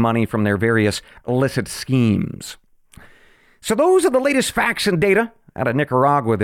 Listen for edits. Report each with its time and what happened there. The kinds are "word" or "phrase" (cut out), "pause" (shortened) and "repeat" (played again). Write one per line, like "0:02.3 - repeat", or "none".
none